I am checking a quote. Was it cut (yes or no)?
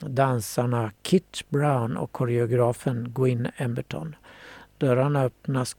no